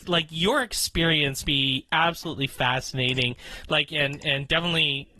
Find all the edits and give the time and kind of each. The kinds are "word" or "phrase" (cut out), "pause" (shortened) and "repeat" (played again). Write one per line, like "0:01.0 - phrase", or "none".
0:01.4 - word

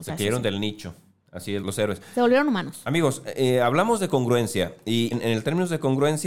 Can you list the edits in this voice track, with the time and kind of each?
0:01.6 - word
0:05.1 - word

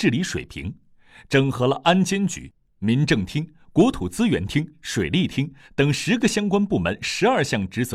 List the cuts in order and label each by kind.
none

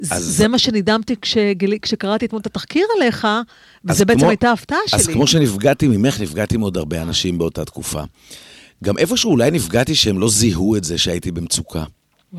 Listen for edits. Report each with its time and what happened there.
none

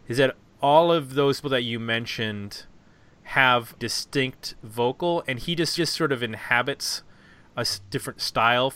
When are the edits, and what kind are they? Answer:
0:01.4 - word
0:03.8 - word
0:05.8 - repeat

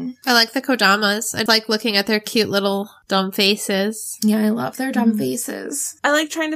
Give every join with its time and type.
0:01.5 - word

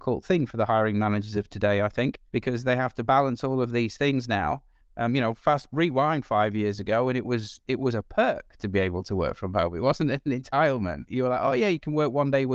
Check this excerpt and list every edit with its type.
0:02.3 - pause

